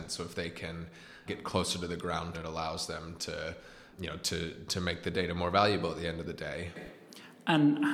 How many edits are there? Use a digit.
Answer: 3